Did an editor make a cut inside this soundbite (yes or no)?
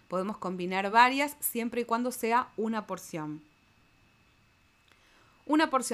no